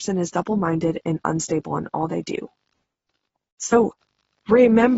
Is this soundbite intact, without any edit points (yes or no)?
yes